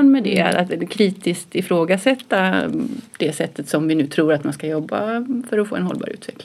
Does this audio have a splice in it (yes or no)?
no